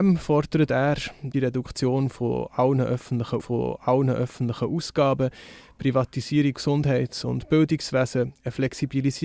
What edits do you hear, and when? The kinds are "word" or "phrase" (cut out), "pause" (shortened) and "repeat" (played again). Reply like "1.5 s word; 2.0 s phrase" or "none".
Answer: 1.3 s word; 3.4 s repeat; 6.5 s word

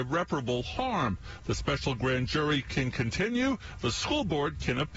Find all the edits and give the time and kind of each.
none

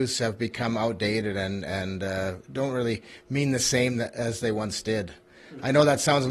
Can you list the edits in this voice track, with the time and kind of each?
2.4 s pause

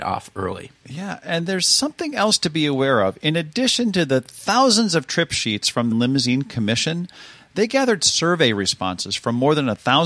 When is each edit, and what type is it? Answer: 5.9 s phrase

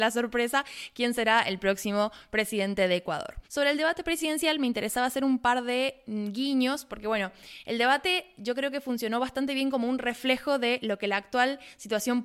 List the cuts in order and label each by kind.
3.4 s pause

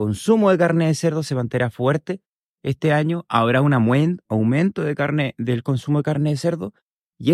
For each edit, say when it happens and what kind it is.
none

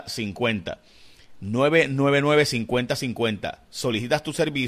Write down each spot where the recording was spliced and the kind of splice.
none

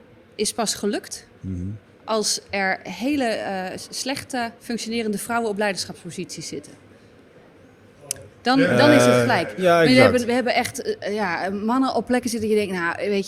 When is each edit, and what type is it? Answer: 1.4 s pause; 4.6 s pause

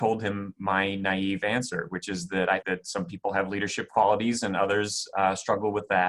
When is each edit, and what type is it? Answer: 2.6 s word

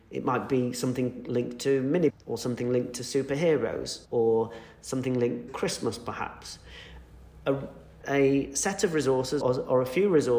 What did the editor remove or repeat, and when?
2.1 s word; 4.0 s pause; 5.5 s word; 8.0 s word; 9.4 s word

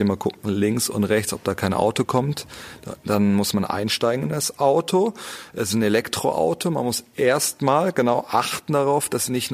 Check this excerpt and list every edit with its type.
none

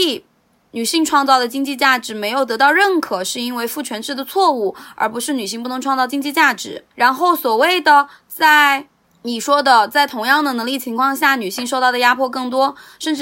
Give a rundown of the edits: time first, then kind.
6.9 s pause

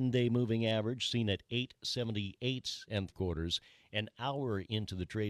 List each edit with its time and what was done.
3.1 s word

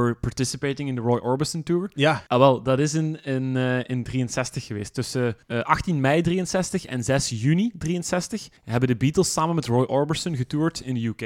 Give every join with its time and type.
2.3 s pause; 5.4 s pause; 8.6 s pause

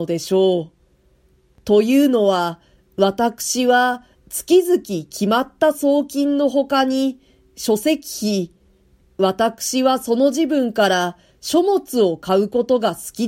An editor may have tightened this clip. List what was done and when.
none

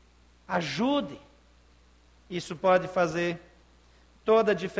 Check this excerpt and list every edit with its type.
none

